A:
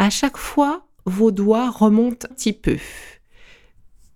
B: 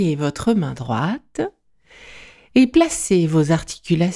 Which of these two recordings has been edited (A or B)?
A